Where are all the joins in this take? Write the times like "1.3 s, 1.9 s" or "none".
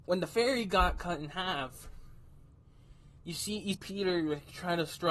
3.7 s